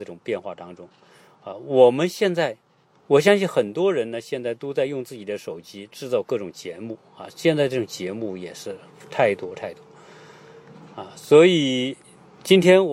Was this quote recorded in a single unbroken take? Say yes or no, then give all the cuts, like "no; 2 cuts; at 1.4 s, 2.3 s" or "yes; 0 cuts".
yes; 0 cuts